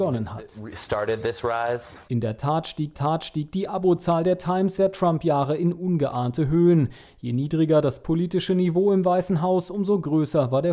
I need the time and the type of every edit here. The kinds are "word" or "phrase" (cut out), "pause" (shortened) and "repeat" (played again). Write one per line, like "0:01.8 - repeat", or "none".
0:02.0 - pause
0:02.9 - repeat
0:04.8 - word